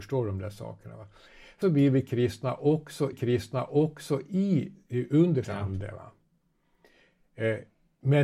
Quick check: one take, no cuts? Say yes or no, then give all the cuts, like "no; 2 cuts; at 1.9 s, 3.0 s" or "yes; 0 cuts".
no; 3 cuts; at 1.6 s, 3.1 s, 5.4 s